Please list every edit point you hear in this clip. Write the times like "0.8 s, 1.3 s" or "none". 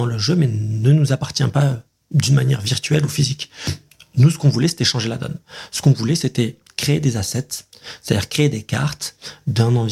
none

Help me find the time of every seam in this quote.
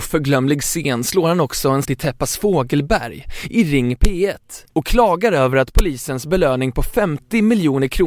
1.8 s

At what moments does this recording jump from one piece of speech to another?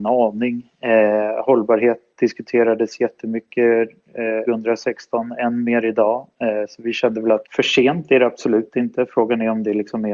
4.4 s, 7.4 s

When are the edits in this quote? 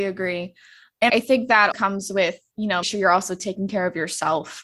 1.1 s, 1.7 s, 2.8 s

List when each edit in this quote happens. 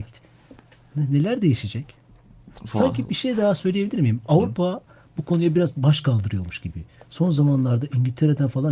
none

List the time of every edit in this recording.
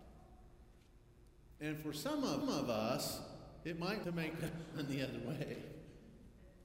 2.4 s, 4.0 s

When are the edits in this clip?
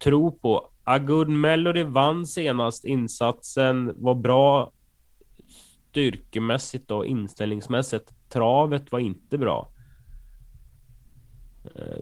none

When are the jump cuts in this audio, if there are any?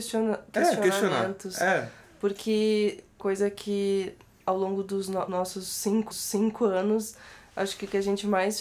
3.2 s, 5.3 s, 6.1 s

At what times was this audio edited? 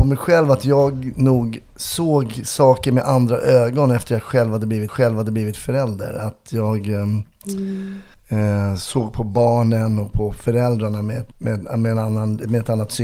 4.9 s, 8.1 s, 11.3 s

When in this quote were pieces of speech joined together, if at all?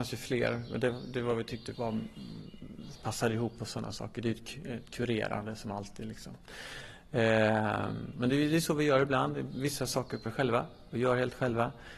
1.7 s, 8.1 s, 10.3 s

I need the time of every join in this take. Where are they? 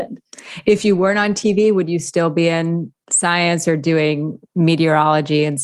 none

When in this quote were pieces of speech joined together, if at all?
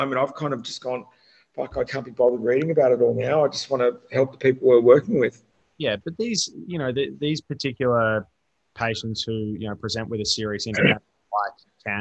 1.9 s

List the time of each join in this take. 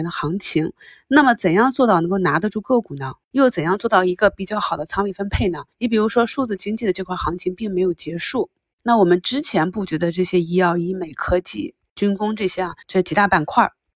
3.2 s, 5.7 s, 12.8 s

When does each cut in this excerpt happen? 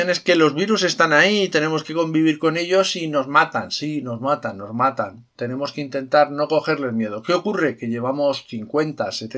5.3 s

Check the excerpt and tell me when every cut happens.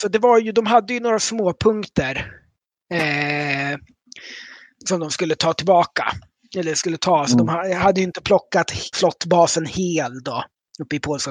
8.9 s

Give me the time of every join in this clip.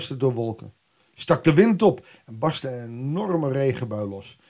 none

